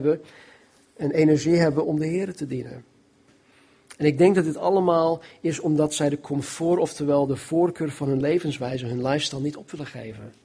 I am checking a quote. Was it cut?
yes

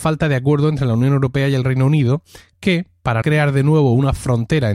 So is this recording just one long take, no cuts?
no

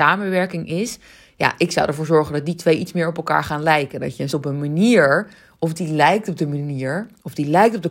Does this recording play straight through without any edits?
no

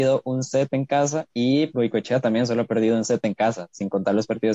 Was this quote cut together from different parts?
no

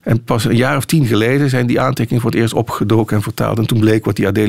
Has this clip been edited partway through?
no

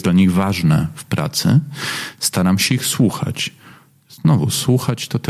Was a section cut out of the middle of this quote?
no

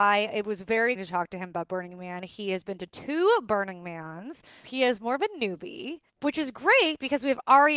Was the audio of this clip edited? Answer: yes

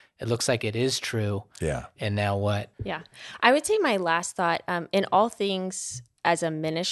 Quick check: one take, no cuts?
no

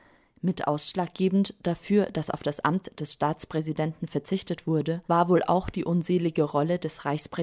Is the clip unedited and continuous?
no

